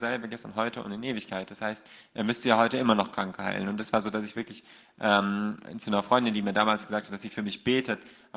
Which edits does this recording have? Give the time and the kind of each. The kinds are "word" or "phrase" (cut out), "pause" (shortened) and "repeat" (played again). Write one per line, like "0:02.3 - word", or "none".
none